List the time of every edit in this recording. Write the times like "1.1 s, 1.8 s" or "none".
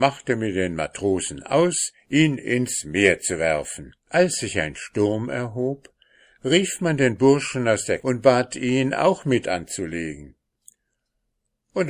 4.0 s, 8.0 s, 9.4 s